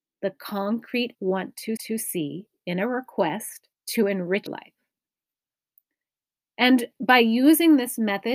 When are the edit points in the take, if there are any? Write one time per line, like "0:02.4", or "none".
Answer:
0:01.1
0:01.8
0:03.7
0:04.5